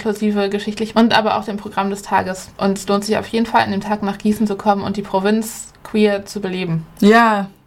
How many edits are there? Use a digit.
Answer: 2